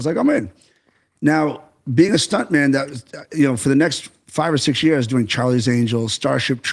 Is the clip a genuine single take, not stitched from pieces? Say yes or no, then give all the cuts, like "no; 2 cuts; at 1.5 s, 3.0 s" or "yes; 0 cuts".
yes; 0 cuts